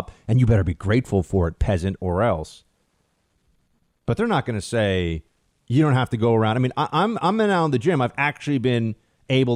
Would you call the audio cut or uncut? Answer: uncut